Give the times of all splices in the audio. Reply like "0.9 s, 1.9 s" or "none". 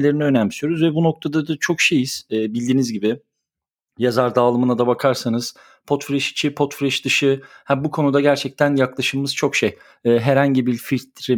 none

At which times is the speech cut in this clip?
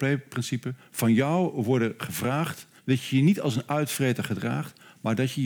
2.8 s

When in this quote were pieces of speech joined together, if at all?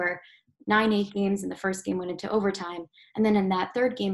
none

